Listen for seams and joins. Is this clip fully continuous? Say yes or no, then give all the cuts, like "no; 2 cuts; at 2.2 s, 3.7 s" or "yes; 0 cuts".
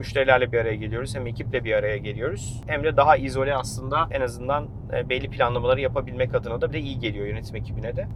no; 1 cut; at 6.7 s